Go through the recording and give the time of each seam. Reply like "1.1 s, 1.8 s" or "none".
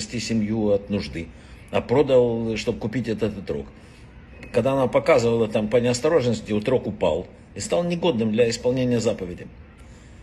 none